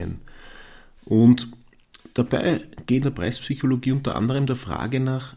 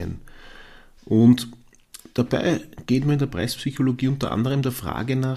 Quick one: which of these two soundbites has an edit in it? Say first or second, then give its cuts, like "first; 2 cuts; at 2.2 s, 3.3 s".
first; 1 cut; at 3.0 s